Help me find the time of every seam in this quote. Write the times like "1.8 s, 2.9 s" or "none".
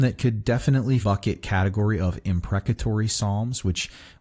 1.0 s